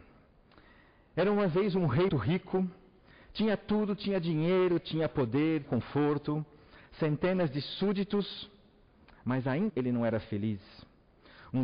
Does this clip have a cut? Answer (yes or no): yes